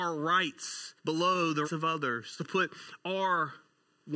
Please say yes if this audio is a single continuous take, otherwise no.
no